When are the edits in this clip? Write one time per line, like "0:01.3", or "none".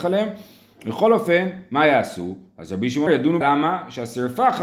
0:03.1
0:03.4

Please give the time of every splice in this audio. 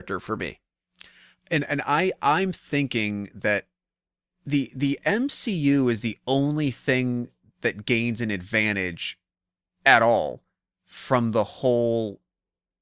none

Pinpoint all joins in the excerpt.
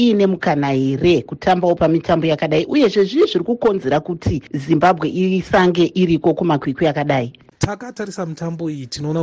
none

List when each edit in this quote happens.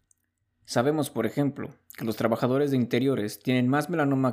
none

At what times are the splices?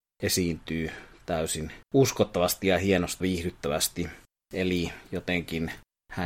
0:01.8
0:03.2

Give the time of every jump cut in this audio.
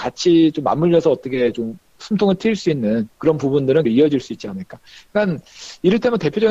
0:03.1
0:03.8

